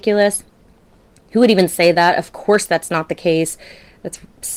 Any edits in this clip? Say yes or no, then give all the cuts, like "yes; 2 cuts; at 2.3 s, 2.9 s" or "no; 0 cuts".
no; 0 cuts